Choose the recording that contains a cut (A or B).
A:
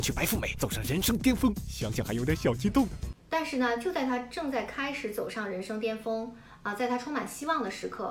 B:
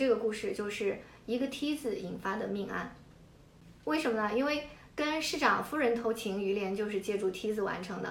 A